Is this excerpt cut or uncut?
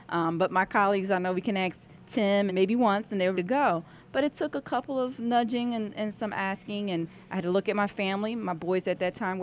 cut